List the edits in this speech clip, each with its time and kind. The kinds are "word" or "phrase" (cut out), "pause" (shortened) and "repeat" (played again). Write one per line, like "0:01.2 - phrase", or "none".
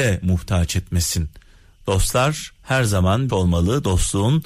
0:02.6 - pause
0:03.3 - phrase